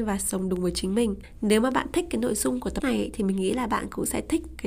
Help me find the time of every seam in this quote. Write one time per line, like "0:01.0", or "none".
0:02.8